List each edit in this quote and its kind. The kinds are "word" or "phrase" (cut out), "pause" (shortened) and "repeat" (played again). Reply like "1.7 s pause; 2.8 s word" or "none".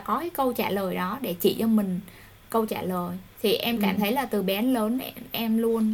3.3 s pause